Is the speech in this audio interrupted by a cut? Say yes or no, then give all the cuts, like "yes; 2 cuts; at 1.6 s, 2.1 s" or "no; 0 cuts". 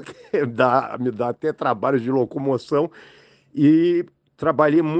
no; 0 cuts